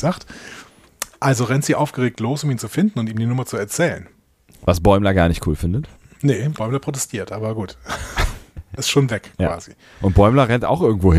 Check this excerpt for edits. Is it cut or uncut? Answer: cut